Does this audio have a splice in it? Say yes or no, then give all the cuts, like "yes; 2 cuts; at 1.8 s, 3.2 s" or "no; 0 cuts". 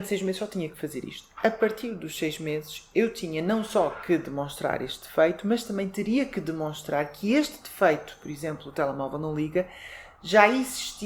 no; 0 cuts